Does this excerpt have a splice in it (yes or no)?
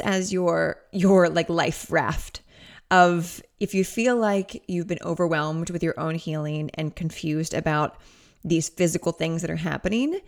no